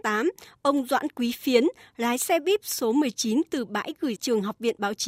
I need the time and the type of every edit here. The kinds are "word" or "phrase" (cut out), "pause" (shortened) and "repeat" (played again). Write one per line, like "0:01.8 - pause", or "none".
0:04.2 - word